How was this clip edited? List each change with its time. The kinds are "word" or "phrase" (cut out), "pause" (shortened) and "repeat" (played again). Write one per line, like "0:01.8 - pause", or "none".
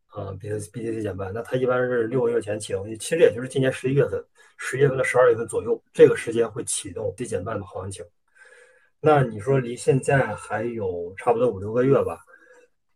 0:07.2 - word